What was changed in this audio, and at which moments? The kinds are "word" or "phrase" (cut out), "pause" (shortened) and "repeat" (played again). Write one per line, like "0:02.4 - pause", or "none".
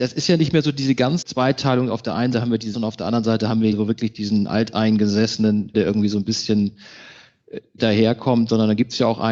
0:01.2 - word
0:02.3 - word
0:02.7 - word
0:03.7 - word
0:05.7 - word
0:07.8 - word